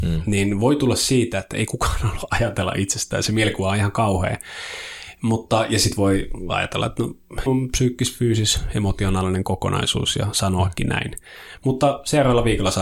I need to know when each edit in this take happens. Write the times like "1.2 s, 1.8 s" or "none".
7.5 s